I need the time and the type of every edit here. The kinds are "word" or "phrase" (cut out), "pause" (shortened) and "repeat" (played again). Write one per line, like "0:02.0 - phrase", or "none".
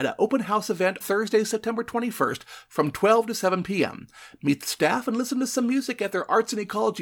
0:01.0 - word